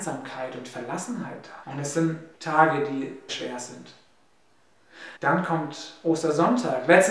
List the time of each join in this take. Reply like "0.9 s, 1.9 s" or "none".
1.6 s, 2.3 s, 3.3 s, 5.2 s